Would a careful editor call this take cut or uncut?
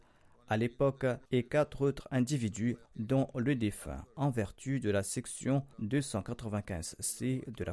cut